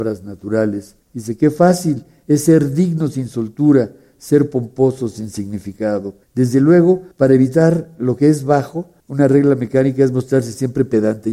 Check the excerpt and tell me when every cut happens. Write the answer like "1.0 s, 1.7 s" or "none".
1.0 s, 6.2 s, 7.1 s, 9.0 s